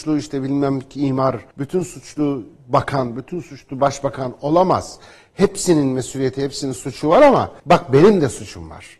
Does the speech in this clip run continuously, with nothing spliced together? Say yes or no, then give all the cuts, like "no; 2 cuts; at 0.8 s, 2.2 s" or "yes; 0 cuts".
no; 2 cuts; at 1.5 s, 7.6 s